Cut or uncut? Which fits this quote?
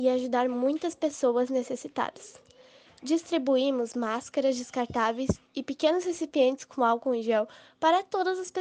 uncut